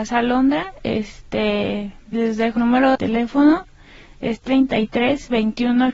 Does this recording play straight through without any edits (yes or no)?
no